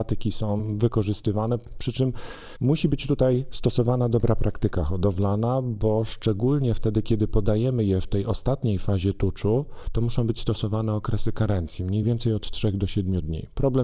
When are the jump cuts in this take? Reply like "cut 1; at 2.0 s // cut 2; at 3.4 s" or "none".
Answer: none